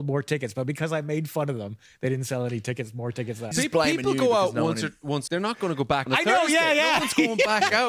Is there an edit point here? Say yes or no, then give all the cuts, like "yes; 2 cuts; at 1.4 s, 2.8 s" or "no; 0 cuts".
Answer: yes; 3 cuts; at 3.5 s, 5.3 s, 6.1 s